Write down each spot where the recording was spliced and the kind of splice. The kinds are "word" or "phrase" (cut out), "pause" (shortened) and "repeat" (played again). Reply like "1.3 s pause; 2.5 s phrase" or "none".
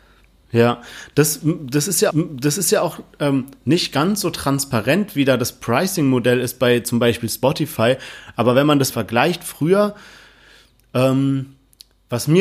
2.1 s repeat; 8.9 s word